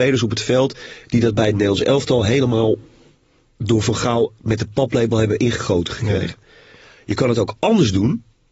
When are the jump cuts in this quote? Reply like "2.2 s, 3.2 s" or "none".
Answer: none